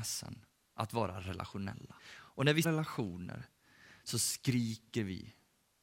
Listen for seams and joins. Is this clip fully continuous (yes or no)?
no